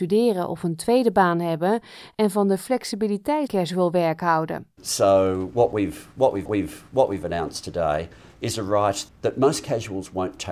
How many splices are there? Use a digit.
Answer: 3